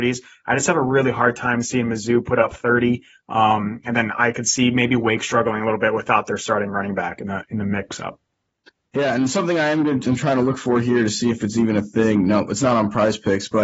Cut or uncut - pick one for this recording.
uncut